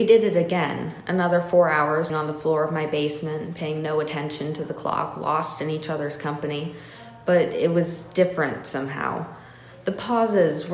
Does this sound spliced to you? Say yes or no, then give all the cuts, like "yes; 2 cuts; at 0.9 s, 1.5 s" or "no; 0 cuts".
yes; 1 cut; at 2.1 s